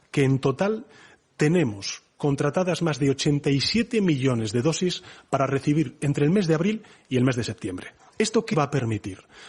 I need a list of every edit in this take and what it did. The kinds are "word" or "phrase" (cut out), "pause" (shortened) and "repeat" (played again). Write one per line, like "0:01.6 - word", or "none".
0:08.5 - word

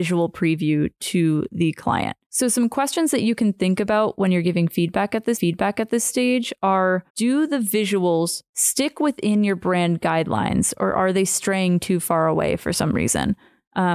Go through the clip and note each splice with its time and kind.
0:02.2 - pause
0:05.3 - repeat
0:07.1 - pause

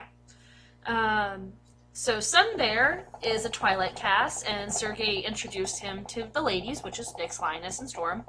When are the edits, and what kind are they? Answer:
none

